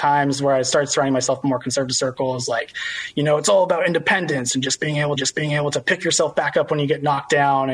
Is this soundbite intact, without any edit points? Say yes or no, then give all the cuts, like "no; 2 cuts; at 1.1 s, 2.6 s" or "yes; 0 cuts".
no; 1 cut; at 5.2 s